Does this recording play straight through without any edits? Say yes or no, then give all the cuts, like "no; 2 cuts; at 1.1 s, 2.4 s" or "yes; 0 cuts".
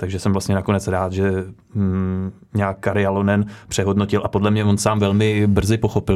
yes; 0 cuts